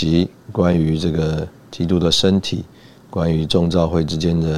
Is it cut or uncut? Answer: uncut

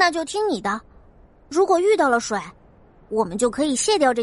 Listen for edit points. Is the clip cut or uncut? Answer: uncut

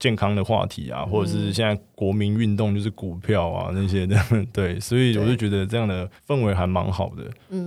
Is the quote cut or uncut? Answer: cut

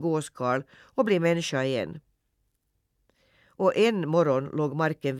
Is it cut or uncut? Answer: uncut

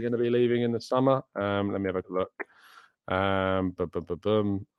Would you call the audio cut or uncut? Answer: cut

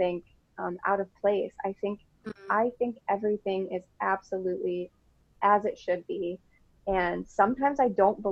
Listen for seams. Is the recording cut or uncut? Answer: uncut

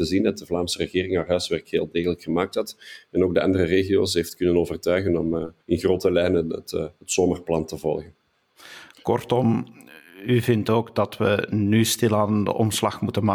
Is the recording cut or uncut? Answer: cut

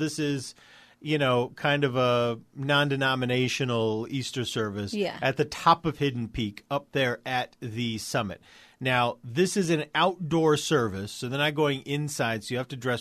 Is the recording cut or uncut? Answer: uncut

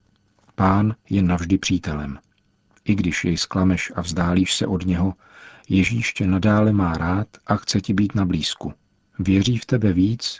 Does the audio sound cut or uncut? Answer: uncut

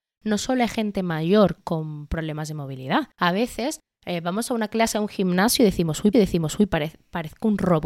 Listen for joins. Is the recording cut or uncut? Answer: cut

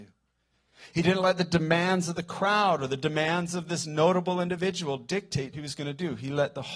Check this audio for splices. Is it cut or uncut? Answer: cut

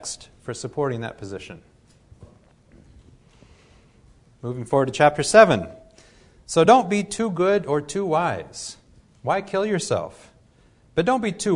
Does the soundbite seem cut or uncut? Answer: uncut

